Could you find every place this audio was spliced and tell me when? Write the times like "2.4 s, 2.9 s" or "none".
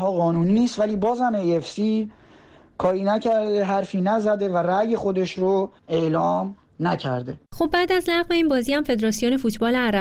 5.8 s, 7.4 s